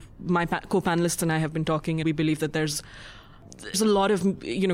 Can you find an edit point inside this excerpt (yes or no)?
yes